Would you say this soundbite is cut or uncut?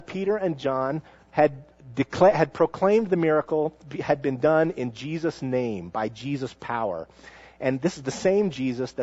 uncut